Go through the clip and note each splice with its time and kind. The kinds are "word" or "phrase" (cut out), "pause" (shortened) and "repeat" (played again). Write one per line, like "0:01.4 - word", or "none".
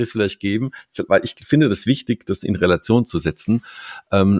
none

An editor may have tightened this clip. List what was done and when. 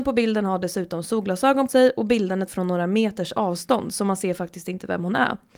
0:01.7 - word
0:02.5 - word

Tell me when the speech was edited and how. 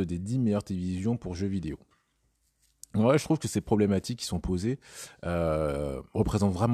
none

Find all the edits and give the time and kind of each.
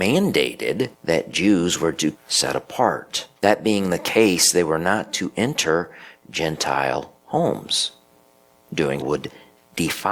0:00.9 - pause
0:02.1 - word
0:03.4 - pause
0:07.2 - pause
0:09.0 - word

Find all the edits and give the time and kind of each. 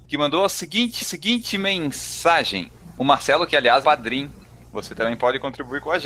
0:01.0 - repeat
0:03.8 - phrase

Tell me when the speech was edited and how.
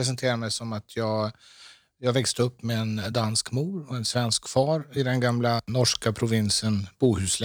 none

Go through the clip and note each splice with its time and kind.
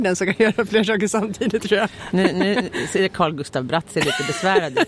none

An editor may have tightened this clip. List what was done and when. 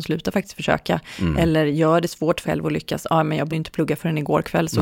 0:02.4 - word
0:03.5 - word

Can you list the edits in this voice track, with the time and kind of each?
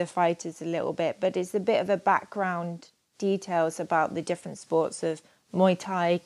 none

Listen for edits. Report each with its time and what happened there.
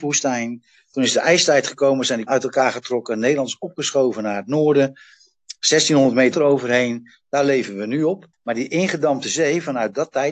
0:02.3 - word
0:06.3 - word
0:08.3 - pause

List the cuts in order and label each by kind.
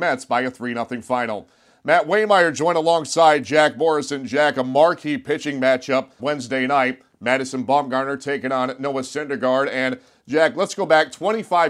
0:06.2 - word

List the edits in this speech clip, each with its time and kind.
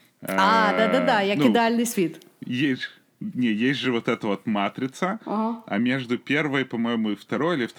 none

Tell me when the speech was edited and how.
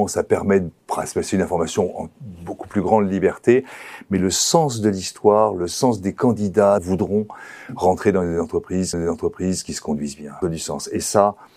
0:06.8 - phrase
0:08.9 - repeat
0:10.4 - word

